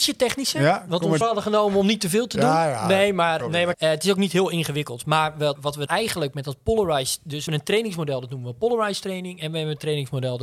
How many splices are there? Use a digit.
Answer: 6